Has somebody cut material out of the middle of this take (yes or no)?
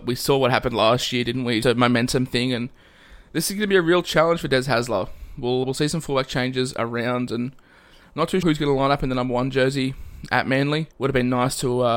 yes